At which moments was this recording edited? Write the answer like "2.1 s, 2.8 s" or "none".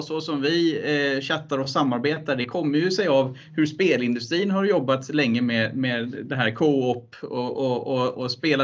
none